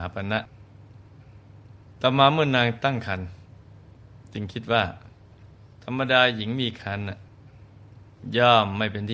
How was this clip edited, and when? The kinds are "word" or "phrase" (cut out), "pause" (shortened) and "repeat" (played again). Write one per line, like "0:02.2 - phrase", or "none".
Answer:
0:05.7 - pause